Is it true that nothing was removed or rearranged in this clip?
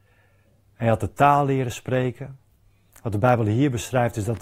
yes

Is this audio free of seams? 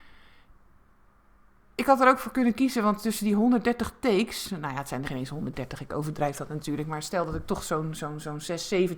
no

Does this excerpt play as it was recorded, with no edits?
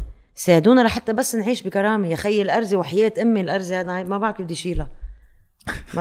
yes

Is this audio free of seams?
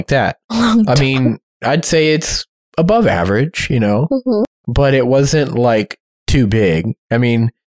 yes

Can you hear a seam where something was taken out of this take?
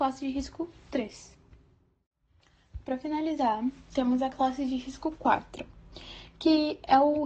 no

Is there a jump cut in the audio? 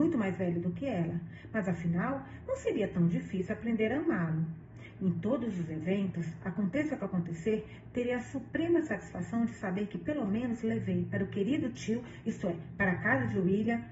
no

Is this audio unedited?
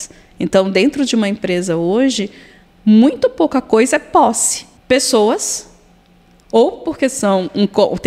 no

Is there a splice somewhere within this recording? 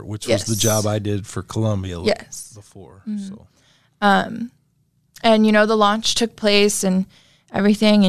no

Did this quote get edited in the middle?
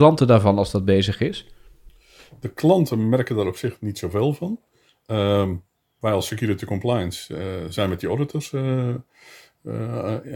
no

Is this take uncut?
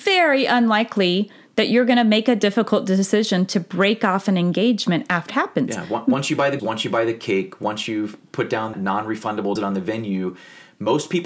no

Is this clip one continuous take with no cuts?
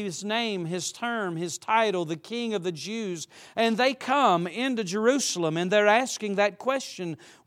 yes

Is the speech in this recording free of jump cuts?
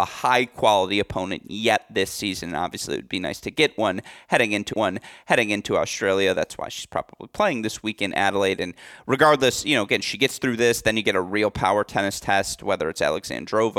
no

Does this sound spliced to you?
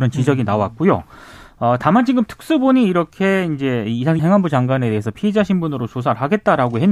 yes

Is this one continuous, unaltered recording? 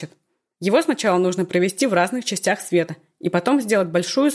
yes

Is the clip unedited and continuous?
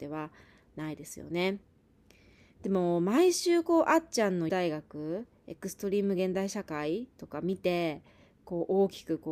no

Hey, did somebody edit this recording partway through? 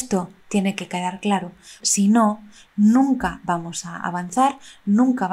yes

